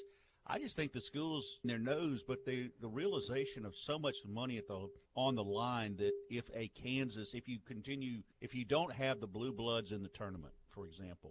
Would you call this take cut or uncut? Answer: cut